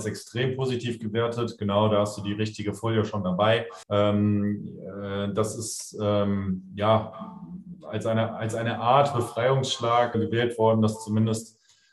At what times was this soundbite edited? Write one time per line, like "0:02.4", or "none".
0:03.8
0:10.1